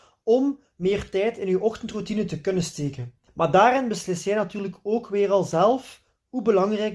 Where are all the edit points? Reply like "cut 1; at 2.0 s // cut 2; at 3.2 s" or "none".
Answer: cut 1; at 3.3 s